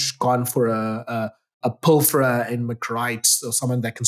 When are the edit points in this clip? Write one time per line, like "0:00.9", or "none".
none

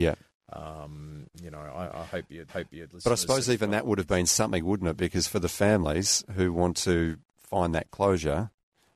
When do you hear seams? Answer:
0:01.3
0:02.5

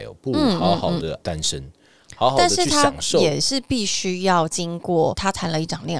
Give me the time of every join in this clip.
none

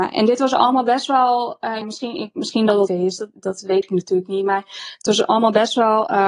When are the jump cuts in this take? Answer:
0:01.8
0:02.9

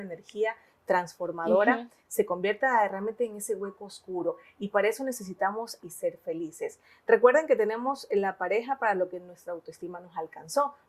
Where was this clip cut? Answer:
0:05.8

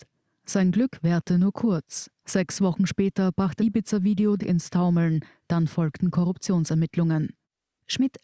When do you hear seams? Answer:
0:02.1
0:03.6
0:04.4

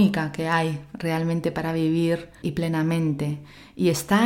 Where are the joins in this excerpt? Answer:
0:02.4

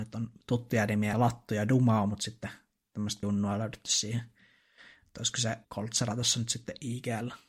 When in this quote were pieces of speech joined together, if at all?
0:01.1
0:03.2
0:05.6

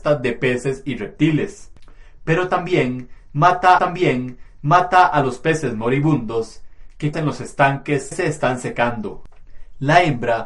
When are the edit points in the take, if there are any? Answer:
0:03.8
0:07.1
0:08.1

